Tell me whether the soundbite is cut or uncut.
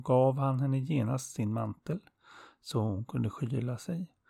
uncut